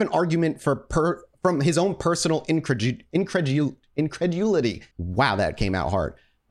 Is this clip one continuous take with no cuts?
no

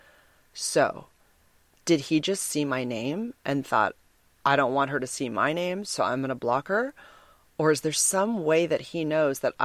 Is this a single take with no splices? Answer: yes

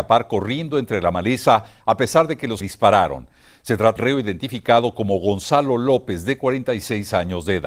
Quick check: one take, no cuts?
no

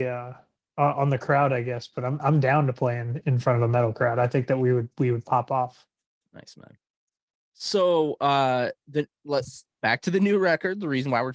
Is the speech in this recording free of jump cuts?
yes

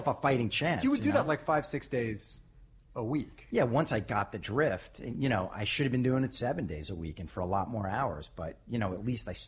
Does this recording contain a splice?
no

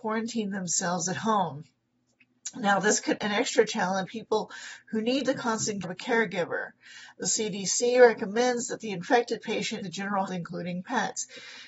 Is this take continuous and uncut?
no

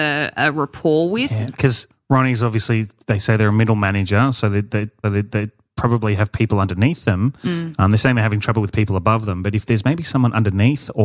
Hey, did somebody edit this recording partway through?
yes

